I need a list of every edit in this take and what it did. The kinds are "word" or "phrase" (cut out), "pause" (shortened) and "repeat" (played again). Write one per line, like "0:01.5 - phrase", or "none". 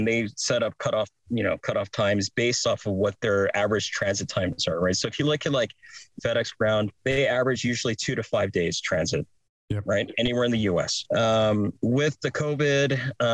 0:06.2 - phrase
0:07.0 - pause

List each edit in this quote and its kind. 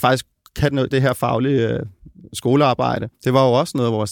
0:00.9 - word
0:03.1 - pause

